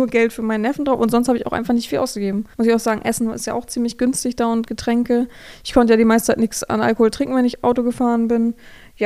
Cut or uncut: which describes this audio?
cut